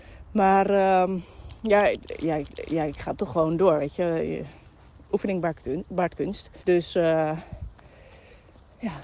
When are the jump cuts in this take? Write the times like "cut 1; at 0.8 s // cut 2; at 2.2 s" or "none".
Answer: cut 1; at 2.5 s // cut 2; at 6.6 s